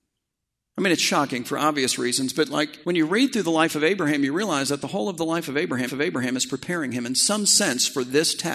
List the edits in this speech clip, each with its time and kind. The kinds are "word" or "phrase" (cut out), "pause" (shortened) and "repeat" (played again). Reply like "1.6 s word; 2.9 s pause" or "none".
2.8 s pause; 5.9 s repeat